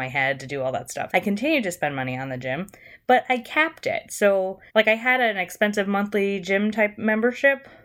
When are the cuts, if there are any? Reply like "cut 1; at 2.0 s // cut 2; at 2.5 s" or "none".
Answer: cut 1; at 1.1 s // cut 2; at 4.7 s